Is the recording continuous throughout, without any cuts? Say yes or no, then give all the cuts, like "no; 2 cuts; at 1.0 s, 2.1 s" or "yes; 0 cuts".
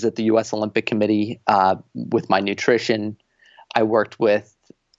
yes; 0 cuts